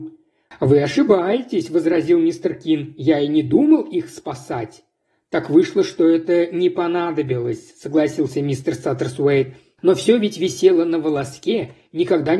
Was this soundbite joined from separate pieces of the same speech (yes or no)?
no